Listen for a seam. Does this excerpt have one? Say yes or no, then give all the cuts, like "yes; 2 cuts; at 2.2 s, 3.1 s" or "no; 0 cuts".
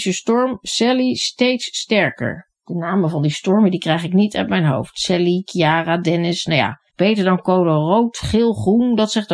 yes; 2 cuts; at 2.5 s, 6.9 s